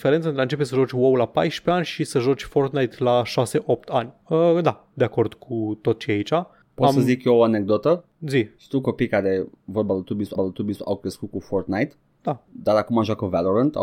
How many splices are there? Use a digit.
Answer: 2